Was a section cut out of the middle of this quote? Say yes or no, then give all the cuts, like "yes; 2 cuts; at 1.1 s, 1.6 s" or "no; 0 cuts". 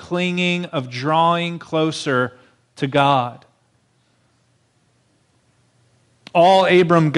no; 0 cuts